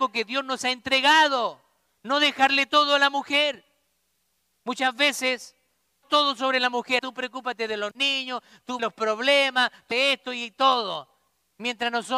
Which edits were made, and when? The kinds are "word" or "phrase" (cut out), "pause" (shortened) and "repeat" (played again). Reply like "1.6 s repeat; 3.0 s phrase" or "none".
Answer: 6.0 s word; 7.0 s word; 8.8 s word; 9.9 s word